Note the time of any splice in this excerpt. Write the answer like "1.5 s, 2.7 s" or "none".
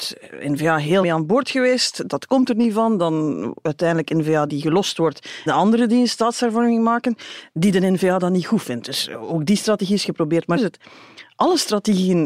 1.0 s, 4.5 s, 5.5 s, 10.6 s